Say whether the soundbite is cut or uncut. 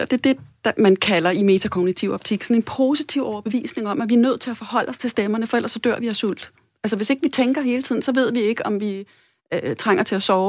uncut